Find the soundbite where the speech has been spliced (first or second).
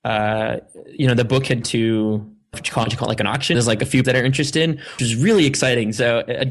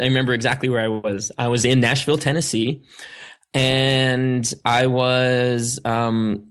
first